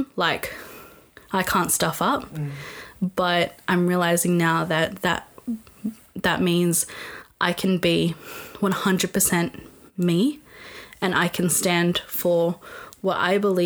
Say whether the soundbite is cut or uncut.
uncut